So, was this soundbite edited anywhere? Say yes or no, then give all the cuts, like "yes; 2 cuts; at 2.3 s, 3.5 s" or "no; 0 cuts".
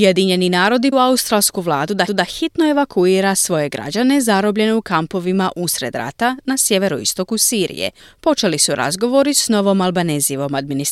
yes; 3 cuts; at 0.9 s, 2.1 s, 8.0 s